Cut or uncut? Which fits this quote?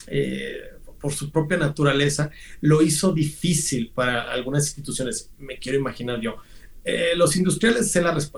uncut